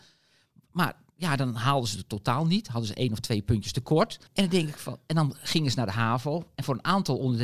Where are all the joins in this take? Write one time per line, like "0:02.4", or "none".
0:04.3